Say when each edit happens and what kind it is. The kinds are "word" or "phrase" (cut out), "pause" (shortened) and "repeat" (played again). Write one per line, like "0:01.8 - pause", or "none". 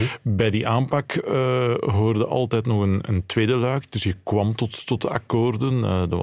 none